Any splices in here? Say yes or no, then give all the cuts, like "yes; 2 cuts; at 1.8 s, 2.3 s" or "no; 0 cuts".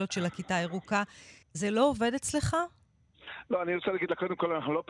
yes; 1 cut; at 1.4 s